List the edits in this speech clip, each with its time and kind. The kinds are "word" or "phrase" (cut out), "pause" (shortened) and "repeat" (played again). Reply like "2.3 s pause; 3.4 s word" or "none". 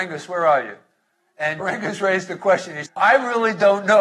1.6 s word; 2.9 s word